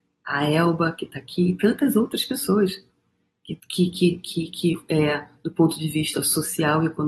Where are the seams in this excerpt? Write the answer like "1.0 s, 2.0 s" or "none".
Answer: 3.6 s